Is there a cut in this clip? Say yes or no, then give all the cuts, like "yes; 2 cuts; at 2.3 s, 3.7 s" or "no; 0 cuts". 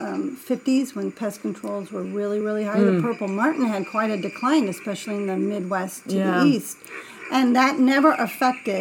no; 0 cuts